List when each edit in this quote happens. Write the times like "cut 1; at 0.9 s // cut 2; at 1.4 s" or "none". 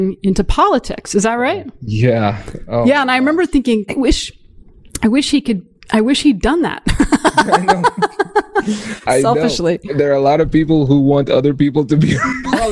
cut 1; at 3.9 s // cut 2; at 9.9 s